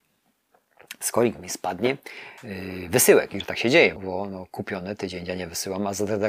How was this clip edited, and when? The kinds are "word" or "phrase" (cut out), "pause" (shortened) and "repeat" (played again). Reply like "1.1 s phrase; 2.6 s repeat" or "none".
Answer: 2.4 s pause; 3.4 s word; 4.0 s word

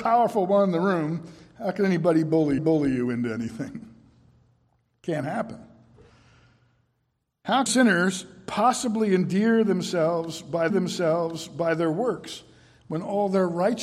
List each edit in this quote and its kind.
2.6 s repeat; 7.7 s word; 10.7 s repeat

